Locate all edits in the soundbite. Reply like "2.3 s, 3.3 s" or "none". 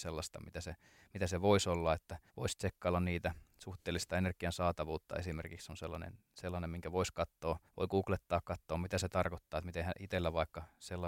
2.3 s, 7.7 s